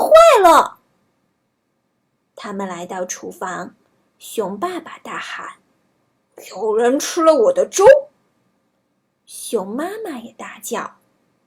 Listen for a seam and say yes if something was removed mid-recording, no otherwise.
no